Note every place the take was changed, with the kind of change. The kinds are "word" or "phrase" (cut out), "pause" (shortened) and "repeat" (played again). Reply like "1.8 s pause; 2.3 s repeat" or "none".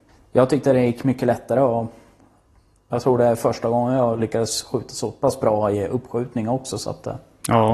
5.7 s word